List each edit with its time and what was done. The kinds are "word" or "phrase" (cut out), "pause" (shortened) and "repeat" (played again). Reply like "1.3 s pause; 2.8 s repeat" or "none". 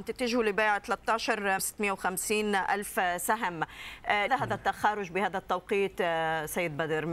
1.6 s word; 4.3 s word